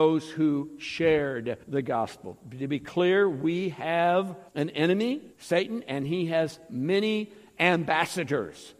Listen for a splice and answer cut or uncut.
cut